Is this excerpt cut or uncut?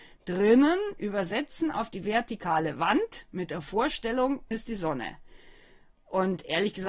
cut